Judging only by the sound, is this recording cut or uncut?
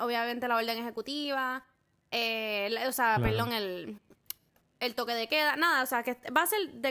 uncut